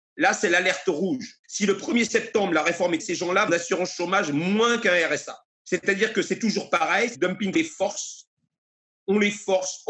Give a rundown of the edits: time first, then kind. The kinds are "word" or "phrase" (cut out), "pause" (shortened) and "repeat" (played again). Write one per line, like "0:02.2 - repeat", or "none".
0:01.4 - pause
0:03.0 - word
0:03.5 - phrase
0:05.5 - pause
0:07.1 - word
0:07.5 - phrase